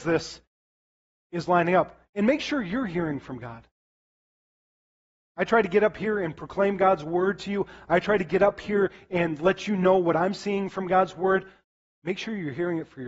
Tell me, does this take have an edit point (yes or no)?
no